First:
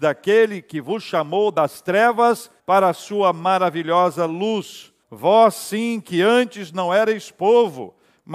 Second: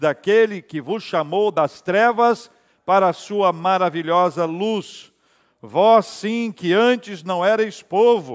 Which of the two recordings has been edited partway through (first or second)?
first